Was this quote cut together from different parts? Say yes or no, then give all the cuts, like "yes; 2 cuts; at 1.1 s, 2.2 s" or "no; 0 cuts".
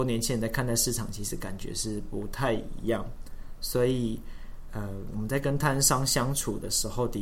no; 0 cuts